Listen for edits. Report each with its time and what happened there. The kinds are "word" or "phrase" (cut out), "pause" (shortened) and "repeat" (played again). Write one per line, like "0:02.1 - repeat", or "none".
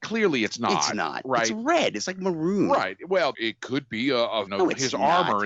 0:03.3 - word
0:04.5 - word